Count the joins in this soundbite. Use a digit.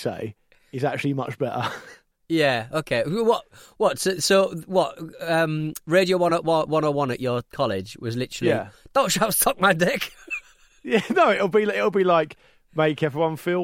0